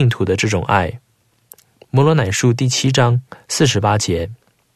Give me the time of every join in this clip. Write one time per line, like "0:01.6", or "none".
none